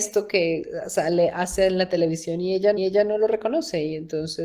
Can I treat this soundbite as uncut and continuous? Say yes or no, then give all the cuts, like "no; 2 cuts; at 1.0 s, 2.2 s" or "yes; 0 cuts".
no; 1 cut; at 2.8 s